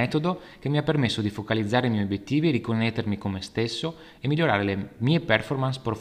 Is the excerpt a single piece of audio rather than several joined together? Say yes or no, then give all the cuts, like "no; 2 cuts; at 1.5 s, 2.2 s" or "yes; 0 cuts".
yes; 0 cuts